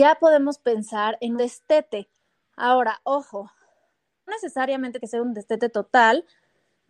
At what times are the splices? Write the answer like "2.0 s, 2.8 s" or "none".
1.4 s, 4.3 s, 5.0 s